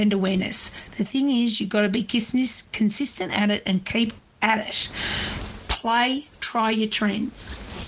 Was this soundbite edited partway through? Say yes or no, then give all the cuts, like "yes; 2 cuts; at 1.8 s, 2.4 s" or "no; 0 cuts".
no; 0 cuts